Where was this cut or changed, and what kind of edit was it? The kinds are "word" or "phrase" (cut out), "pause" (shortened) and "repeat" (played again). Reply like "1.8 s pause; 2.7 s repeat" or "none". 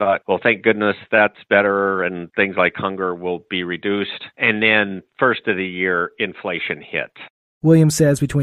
none